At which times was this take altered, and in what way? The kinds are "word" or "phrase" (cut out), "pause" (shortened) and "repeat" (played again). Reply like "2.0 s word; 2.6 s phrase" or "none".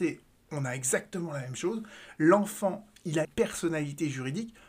3.2 s word